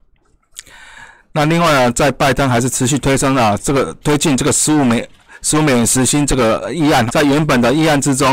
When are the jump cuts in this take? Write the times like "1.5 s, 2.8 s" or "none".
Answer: 7.1 s

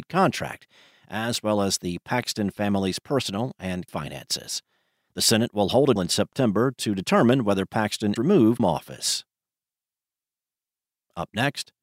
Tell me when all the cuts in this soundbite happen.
3.9 s, 6.0 s, 8.2 s, 8.6 s

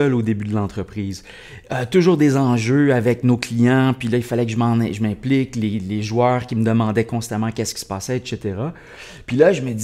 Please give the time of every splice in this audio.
none

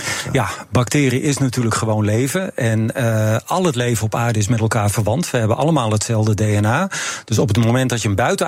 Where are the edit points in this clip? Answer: none

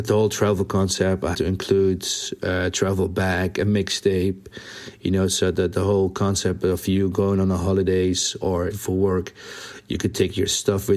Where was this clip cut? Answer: 1.3 s, 8.7 s

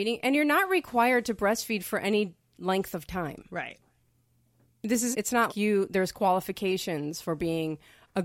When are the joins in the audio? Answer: 5.1 s, 5.5 s

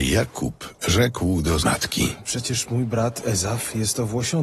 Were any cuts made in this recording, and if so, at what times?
1.6 s

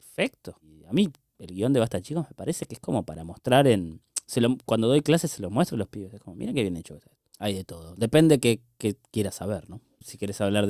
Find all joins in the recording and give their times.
none

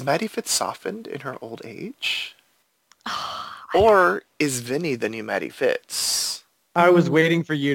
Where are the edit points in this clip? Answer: none

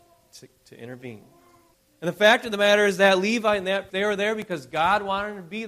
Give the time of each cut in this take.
1.7 s, 3.9 s

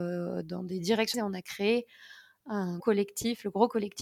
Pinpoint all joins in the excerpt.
1.1 s, 2.8 s

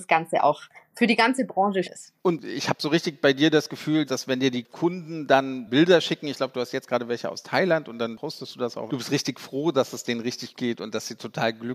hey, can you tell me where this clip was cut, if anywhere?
1.8 s, 2.2 s, 4.1 s, 8.9 s, 10.5 s

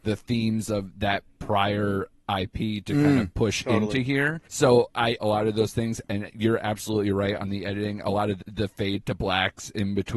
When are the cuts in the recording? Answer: 4.4 s, 5.2 s, 8.4 s

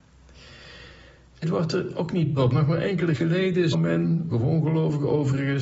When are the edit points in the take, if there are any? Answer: 1.4 s, 2.4 s, 3.1 s, 3.7 s, 4.3 s

